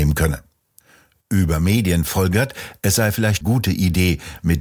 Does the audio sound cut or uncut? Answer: cut